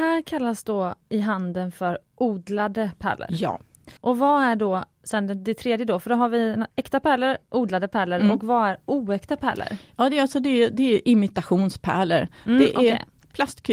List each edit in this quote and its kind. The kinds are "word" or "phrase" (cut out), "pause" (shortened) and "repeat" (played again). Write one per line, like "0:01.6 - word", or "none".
0:01.0 - pause
0:04.0 - pause
0:06.7 - pause